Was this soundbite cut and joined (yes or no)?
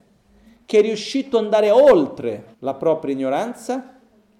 yes